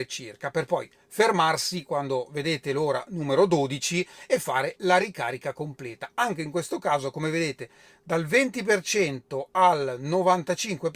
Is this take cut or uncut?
uncut